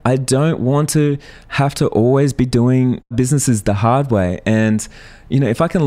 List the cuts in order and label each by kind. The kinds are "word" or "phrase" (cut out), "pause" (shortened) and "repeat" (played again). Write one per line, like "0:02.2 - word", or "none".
0:03.1 - word